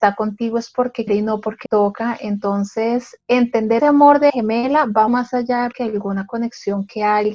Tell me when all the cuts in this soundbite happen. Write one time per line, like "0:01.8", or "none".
0:01.1
0:01.6
0:03.8
0:04.3
0:05.1
0:05.7

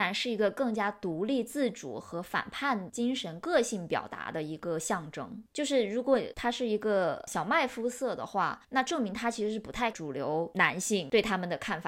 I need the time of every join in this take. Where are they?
0:09.9

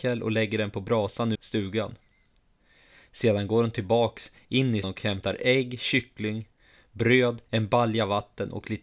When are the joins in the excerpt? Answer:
0:01.3
0:04.8
0:07.5

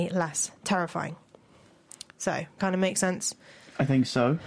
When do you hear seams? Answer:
0:02.6

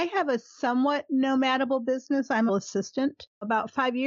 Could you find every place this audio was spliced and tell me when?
0:02.5

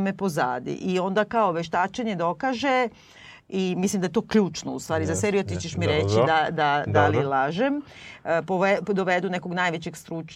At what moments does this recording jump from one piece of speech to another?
none

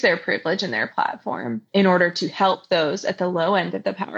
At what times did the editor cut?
0:01.7

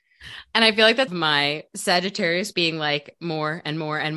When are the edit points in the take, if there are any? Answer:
0:01.1
0:02.5

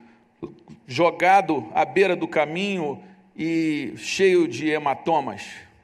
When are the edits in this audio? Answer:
none

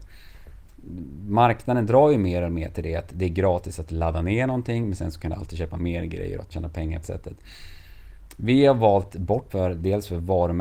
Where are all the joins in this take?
0:06.5
0:07.0
0:09.5

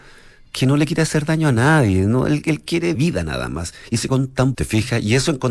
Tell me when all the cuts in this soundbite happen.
0:02.9
0:04.1
0:04.5

